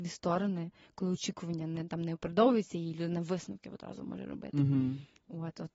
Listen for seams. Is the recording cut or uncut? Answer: uncut